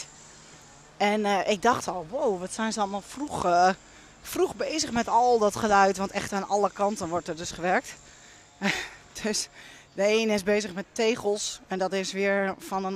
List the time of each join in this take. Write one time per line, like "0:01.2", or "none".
none